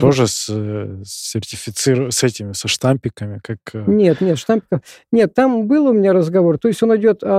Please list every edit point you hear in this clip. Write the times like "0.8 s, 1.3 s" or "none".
none

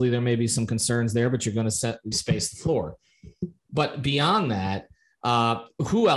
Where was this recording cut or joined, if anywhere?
2.1 s

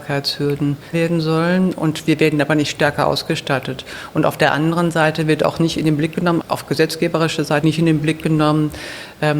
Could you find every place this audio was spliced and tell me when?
0.9 s, 6.4 s, 7.6 s

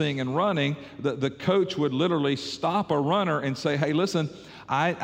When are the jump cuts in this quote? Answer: none

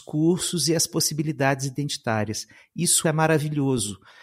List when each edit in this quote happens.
3.0 s

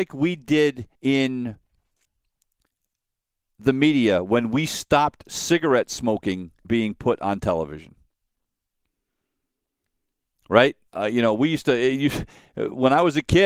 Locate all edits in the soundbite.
0.9 s, 6.6 s, 10.9 s

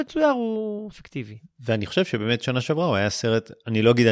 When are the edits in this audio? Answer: 0.9 s

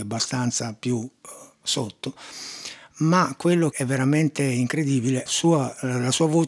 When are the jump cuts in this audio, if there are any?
3.7 s, 5.3 s

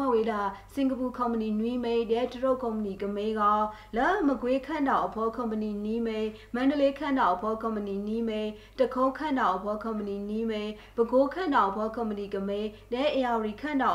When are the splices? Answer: none

